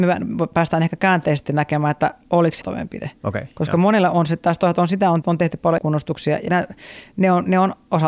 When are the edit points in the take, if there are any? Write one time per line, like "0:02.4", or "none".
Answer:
0:02.6
0:05.2
0:05.8
0:06.5

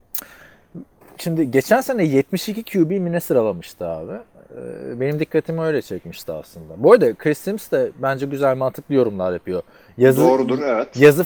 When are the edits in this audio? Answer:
none

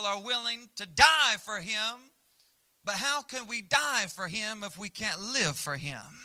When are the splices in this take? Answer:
none

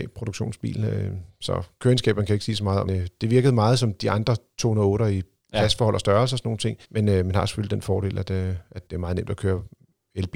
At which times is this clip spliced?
0:02.9
0:06.8
0:08.9

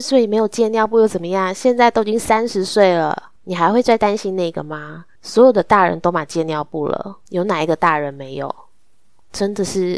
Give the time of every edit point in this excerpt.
0:03.4
0:05.2
0:07.3

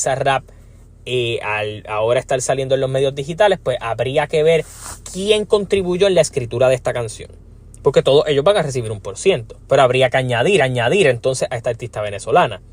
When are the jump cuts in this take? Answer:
0:09.6
0:10.6

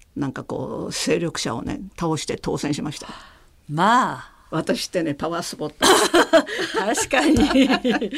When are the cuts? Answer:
none

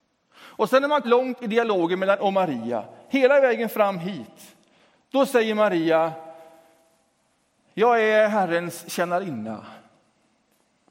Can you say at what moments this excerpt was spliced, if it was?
0:01.0
0:02.2

